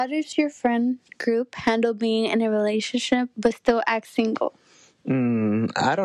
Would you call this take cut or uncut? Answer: uncut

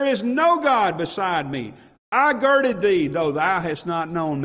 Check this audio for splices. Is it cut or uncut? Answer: uncut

